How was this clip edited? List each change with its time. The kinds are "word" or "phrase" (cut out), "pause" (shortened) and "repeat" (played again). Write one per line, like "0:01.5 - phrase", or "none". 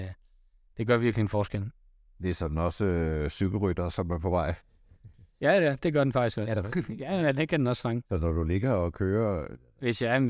0:08.0 - pause

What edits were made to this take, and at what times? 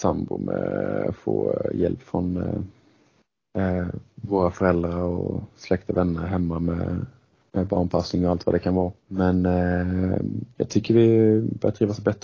0:09.0 - pause

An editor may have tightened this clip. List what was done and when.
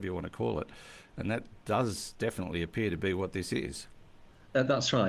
none

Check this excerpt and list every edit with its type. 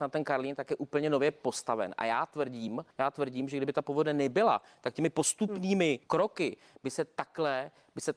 0:02.9 - pause
0:06.0 - pause

